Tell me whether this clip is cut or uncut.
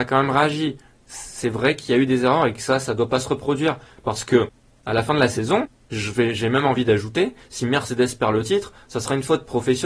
uncut